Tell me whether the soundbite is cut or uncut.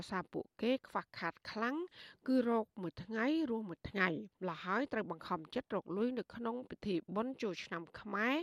cut